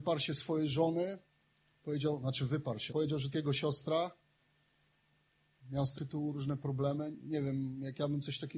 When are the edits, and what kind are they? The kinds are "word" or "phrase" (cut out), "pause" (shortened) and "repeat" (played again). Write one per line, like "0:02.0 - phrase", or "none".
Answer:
0:02.9 - word
0:03.3 - word
0:05.9 - word